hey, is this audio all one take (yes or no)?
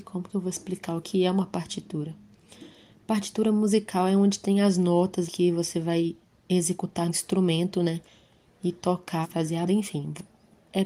no